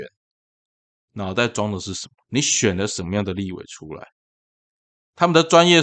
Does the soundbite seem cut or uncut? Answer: cut